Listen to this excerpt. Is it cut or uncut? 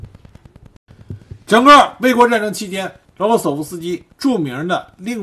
cut